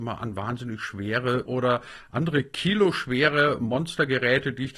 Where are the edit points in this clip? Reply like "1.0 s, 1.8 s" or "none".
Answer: 1.4 s